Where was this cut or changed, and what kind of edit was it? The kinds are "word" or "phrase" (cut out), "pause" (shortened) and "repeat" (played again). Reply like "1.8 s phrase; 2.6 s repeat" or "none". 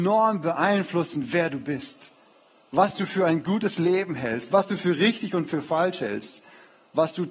none